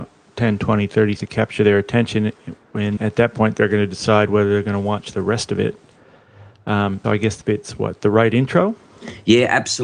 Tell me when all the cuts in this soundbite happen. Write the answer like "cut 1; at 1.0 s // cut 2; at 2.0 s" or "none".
cut 1; at 1.2 s // cut 2; at 3.0 s // cut 3; at 7.0 s // cut 4; at 7.4 s